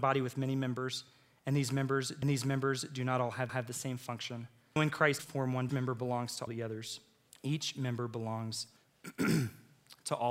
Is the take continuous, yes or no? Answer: no